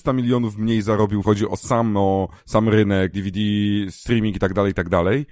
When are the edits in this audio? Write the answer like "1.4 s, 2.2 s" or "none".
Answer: 1.2 s, 2.4 s, 3.1 s